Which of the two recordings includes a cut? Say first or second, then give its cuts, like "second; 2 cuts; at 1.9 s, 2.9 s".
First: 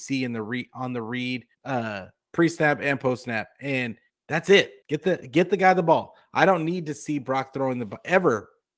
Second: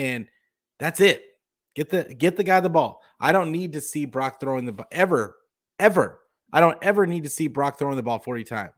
first; 3 cuts; at 1.5 s, 4.1 s, 4.8 s